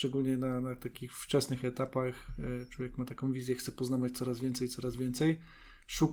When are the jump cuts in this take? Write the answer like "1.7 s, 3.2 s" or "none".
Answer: none